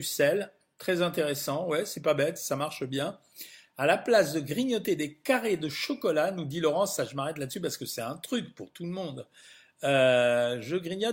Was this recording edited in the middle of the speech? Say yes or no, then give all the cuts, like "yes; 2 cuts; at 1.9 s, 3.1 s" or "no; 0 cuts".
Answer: no; 0 cuts